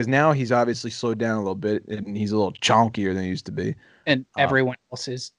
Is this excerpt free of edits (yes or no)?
yes